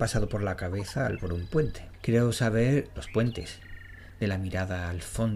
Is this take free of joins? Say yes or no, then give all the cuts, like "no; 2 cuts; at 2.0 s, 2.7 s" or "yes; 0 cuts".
no; 2 cuts; at 1.2 s, 3.0 s